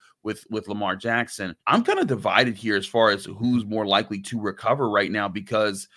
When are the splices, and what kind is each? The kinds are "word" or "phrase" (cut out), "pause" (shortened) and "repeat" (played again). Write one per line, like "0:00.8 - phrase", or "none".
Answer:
0:01.6 - pause